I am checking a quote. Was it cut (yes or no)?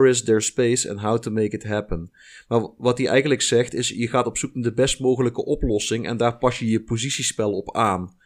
no